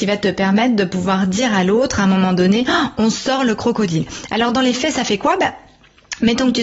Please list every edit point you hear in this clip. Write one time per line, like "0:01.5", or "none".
none

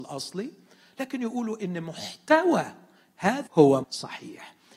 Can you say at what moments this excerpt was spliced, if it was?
0:03.5
0:03.8

